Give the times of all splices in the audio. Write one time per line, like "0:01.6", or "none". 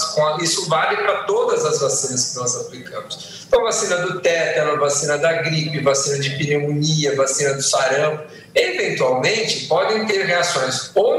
none